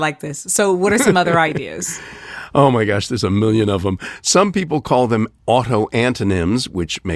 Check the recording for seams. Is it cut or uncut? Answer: uncut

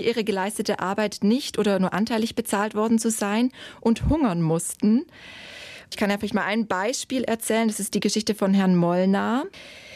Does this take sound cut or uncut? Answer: uncut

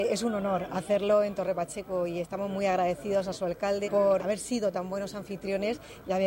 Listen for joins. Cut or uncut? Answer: cut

